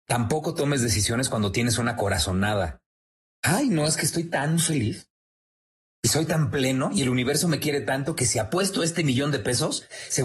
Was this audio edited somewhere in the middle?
no; 0 cuts

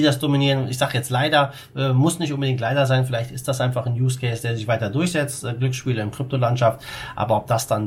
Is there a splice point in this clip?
no; 0 cuts

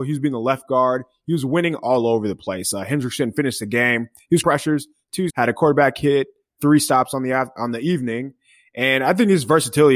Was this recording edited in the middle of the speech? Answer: yes; 2 cuts; at 4.4 s, 5.3 s

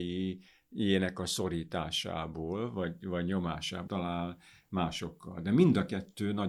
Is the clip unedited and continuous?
no; 1 cut; at 3.9 s

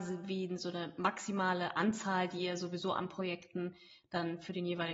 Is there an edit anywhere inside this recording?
no; 0 cuts

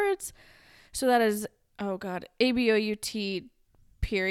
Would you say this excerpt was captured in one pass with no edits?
yes; 0 cuts

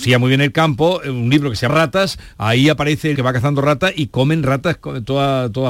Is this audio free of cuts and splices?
no; 2 cuts; at 1.7 s, 3.2 s

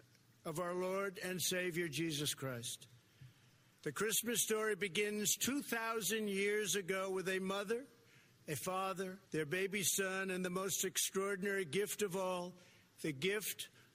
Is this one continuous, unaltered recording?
no; 1 cut; at 9.3 s

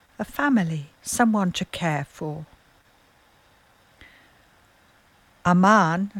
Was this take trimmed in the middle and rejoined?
yes; 1 cut; at 0.9 s

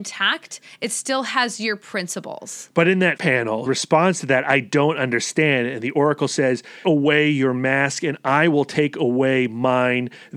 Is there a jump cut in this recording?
yes; 3 cuts; at 3.2 s, 3.7 s, 6.8 s

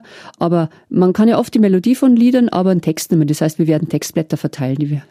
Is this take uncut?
no; 1 cut; at 1.1 s

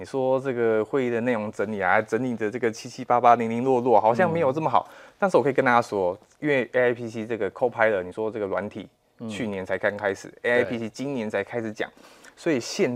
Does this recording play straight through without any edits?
yes; 0 cuts

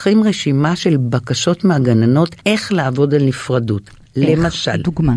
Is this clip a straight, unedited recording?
no; 1 cut; at 2.4 s

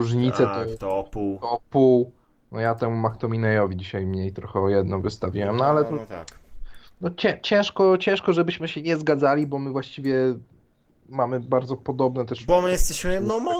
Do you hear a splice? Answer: no; 0 cuts

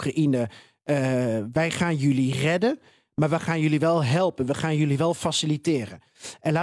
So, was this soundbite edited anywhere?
no; 0 cuts

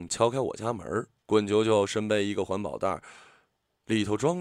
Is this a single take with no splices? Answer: no; 1 cut; at 1.2 s

